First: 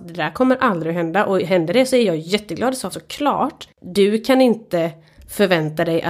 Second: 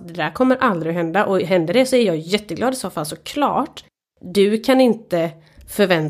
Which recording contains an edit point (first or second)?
first